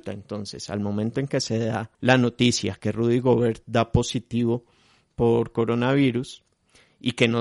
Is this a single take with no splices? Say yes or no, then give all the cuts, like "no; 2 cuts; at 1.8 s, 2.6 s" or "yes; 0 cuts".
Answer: no; 1 cut; at 1.9 s